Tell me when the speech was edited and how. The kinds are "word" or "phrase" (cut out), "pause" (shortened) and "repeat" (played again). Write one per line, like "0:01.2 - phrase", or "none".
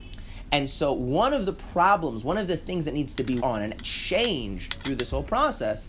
0:03.4 - word
0:03.8 - word